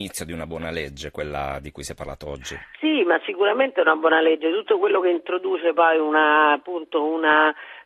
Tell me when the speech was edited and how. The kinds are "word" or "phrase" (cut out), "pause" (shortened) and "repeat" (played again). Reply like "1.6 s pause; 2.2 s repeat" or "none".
2.7 s pause